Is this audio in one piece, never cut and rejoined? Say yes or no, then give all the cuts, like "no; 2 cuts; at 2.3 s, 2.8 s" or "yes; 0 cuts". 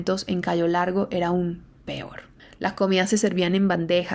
no; 1 cut; at 2.4 s